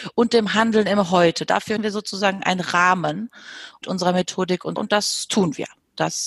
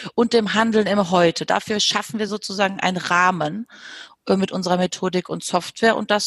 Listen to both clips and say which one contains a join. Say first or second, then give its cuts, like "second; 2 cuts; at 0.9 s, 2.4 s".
first; 3 cuts; at 1.8 s, 3.8 s, 4.8 s